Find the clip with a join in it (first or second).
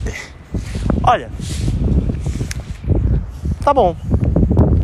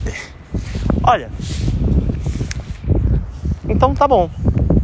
first